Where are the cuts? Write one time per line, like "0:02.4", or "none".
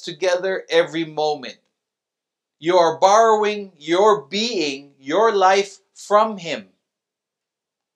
none